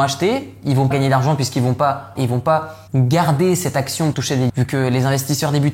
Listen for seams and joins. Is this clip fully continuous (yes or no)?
no